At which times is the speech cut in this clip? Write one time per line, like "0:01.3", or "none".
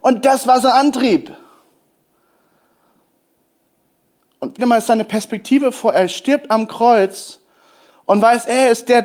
0:04.6

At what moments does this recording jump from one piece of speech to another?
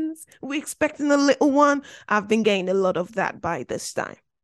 none

